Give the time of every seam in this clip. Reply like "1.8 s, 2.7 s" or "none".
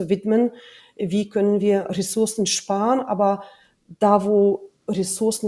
none